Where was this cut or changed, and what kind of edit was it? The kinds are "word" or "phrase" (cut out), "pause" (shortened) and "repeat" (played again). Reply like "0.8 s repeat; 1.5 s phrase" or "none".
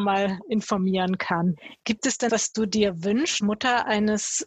1.8 s pause; 2.3 s phrase; 3.4 s word